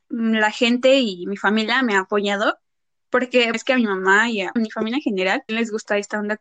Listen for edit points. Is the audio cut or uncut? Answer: cut